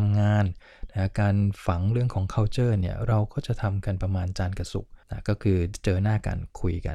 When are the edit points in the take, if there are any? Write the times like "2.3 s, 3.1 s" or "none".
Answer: 5.0 s